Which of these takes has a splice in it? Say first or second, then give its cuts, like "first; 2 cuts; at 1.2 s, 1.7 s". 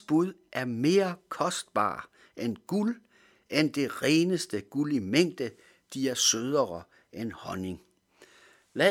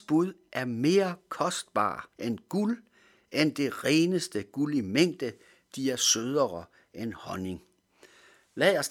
second; 1 cut; at 2.1 s